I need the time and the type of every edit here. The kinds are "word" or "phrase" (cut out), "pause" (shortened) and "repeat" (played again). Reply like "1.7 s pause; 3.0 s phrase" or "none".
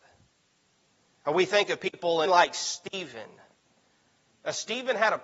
2.3 s phrase